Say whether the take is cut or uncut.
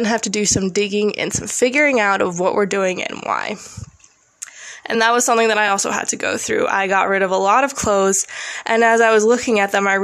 uncut